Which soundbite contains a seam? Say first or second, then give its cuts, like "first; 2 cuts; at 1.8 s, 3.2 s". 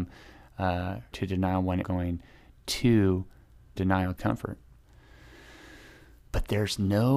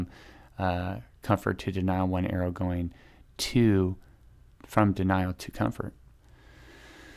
first; 4 cuts; at 1.1 s, 1.8 s, 3.8 s, 4.2 s